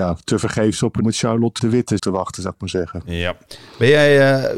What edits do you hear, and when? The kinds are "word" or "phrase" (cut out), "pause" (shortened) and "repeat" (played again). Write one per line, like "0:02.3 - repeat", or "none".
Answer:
0:01.0 - word
0:01.6 - word
0:02.0 - word